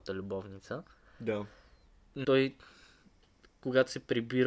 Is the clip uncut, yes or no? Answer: no